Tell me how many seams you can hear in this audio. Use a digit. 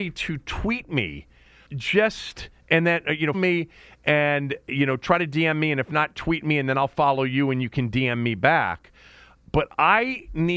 2